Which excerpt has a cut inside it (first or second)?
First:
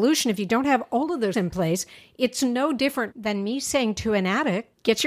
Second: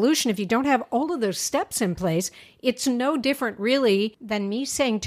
first